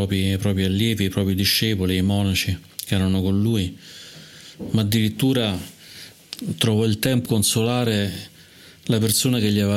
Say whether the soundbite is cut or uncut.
cut